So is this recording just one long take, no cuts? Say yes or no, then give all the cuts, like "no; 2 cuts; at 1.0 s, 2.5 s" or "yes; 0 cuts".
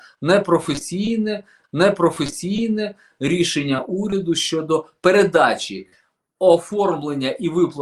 no; 1 cut; at 1.6 s